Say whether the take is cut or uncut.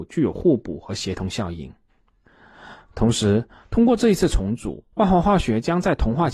cut